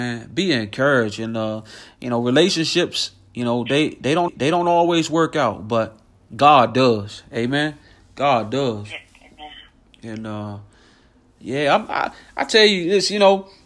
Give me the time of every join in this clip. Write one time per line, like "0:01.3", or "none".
0:04.3